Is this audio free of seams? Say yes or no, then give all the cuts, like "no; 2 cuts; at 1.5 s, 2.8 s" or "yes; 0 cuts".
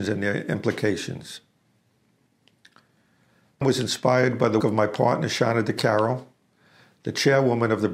no; 2 cuts; at 3.6 s, 4.6 s